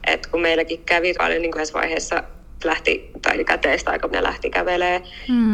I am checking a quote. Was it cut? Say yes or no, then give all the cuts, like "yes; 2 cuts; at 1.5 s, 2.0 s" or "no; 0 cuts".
yes; 5 cuts; at 1.1 s, 1.5 s, 2.6 s, 3.3 s, 4.1 s